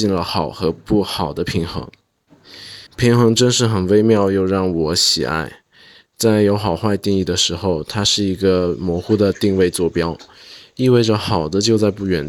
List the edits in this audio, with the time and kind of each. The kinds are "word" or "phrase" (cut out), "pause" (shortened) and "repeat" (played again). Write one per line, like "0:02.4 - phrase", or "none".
0:02.9 - pause